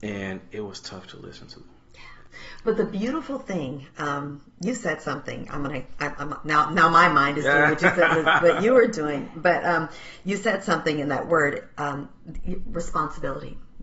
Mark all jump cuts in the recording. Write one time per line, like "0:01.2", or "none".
none